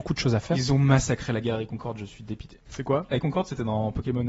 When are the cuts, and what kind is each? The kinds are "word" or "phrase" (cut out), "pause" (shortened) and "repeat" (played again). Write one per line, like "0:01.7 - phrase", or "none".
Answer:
0:02.7 - pause
0:03.2 - word